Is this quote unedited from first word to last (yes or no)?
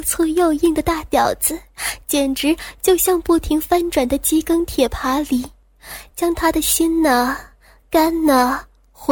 yes